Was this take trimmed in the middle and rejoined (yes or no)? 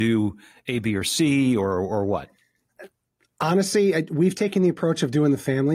no